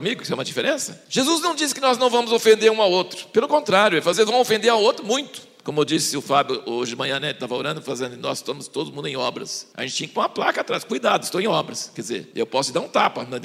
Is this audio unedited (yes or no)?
no